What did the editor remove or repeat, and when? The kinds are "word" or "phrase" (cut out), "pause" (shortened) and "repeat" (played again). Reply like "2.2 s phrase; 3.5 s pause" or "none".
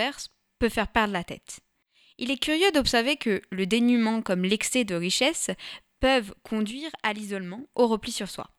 none